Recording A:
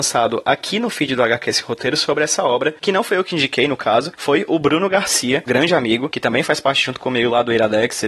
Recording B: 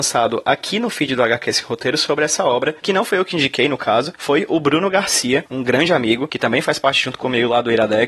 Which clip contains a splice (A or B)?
A